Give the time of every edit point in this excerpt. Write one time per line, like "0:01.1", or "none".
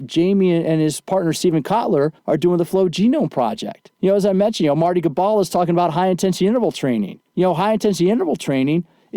0:02.2
0:03.9
0:07.3